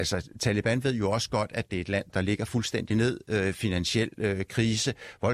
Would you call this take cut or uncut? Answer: cut